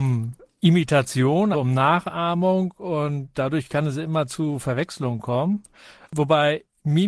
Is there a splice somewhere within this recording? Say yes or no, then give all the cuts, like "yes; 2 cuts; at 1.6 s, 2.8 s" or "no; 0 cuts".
yes; 1 cut; at 1.5 s